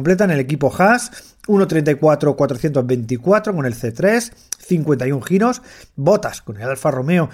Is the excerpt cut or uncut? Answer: uncut